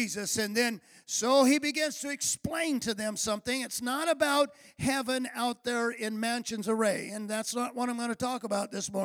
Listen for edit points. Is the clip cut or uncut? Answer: uncut